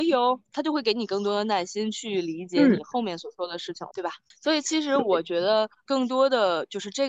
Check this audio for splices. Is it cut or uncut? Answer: cut